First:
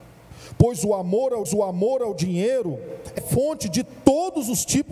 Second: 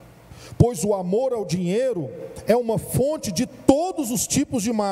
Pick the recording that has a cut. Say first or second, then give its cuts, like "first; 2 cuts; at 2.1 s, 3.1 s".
first; 2 cuts; at 1.4 s, 3.2 s